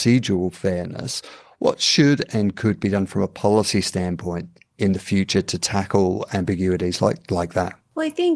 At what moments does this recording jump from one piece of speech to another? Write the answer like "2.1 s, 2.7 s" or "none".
none